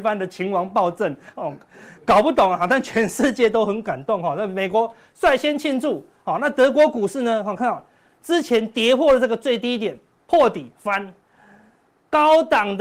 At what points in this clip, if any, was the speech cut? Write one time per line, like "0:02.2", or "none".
none